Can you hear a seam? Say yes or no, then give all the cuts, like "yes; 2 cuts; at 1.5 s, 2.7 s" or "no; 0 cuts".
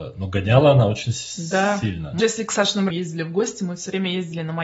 yes; 2 cuts; at 2.2 s, 2.9 s